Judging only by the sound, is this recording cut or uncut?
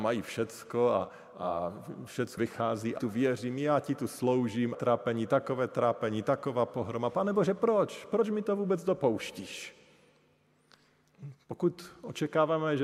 cut